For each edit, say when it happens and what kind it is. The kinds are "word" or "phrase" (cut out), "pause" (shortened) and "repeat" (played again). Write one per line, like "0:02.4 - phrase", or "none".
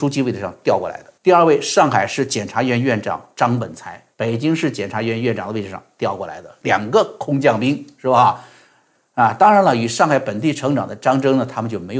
0:01.2 - pause
0:04.1 - pause